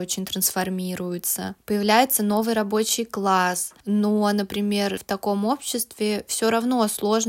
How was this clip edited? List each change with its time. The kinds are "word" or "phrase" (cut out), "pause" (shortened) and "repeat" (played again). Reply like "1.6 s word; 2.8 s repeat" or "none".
5.0 s word